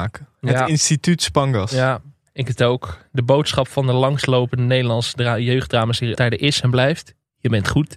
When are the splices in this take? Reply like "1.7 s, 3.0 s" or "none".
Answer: 2.5 s, 6.1 s